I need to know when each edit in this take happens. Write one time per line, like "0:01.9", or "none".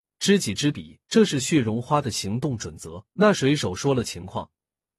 0:01.1
0:03.1

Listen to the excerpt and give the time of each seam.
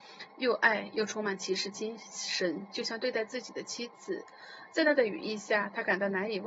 none

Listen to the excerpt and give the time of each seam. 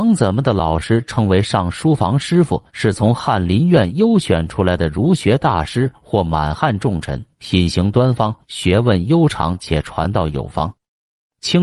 0:02.7
0:07.3
0:08.4

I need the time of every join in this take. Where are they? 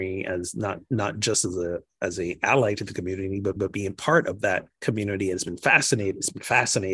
0:03.6
0:04.7

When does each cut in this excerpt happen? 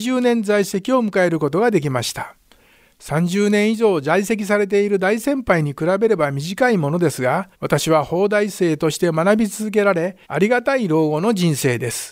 0:07.5
0:10.2

